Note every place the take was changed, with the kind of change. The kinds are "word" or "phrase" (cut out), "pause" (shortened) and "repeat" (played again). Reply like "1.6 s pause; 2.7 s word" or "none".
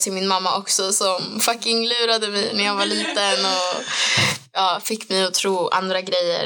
none